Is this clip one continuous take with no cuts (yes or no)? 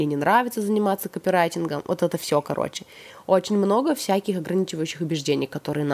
yes